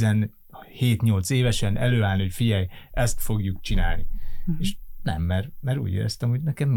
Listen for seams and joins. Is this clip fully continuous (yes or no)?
yes